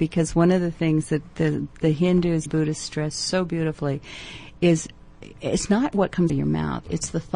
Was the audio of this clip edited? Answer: yes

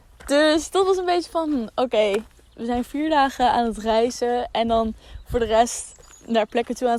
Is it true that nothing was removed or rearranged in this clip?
yes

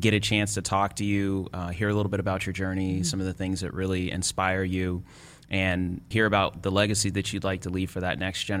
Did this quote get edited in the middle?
yes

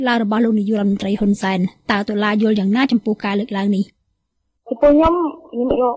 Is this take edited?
no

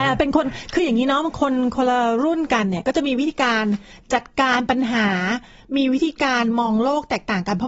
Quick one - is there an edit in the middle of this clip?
no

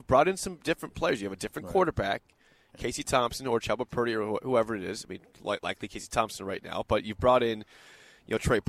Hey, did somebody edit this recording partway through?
no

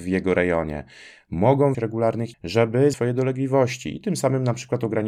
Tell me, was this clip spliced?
yes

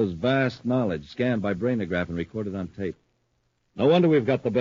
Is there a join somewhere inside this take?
no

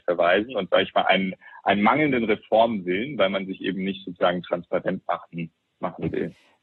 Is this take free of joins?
yes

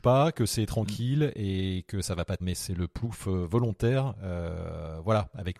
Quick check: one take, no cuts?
no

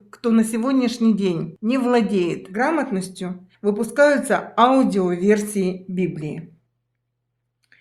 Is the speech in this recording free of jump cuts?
no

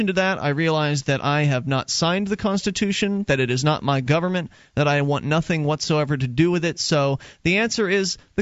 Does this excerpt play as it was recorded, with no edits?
yes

